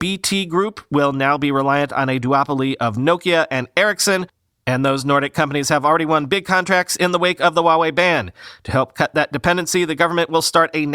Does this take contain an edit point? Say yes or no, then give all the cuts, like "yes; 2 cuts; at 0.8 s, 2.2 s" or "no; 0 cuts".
no; 0 cuts